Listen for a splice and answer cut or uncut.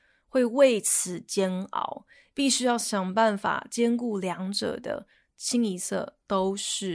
uncut